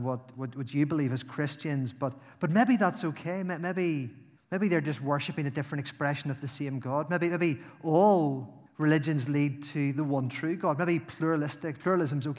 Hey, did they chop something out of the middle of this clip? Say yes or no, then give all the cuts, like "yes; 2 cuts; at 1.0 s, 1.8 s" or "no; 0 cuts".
yes; 2 cuts; at 4.4 s, 8.7 s